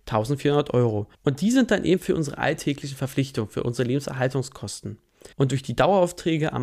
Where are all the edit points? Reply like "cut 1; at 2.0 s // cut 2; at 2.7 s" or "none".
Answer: cut 1; at 1.1 s // cut 2; at 5.3 s